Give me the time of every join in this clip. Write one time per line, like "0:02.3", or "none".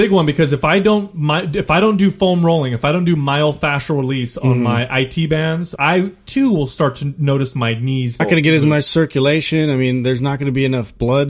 0:05.8
0:08.2